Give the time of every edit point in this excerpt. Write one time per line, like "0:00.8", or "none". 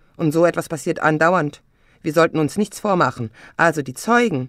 none